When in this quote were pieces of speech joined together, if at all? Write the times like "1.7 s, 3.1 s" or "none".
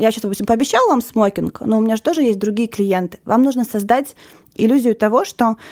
none